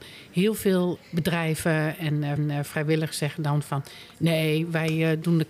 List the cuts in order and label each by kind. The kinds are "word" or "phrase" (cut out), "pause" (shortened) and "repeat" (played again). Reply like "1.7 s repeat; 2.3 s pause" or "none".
1.0 s word; 2.4 s repeat